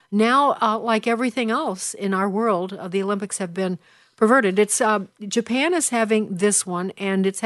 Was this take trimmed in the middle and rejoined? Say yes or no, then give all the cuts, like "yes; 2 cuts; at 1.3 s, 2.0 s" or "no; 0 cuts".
no; 0 cuts